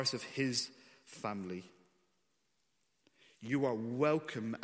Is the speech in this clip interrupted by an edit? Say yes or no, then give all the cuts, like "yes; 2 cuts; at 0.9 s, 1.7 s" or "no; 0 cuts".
no; 0 cuts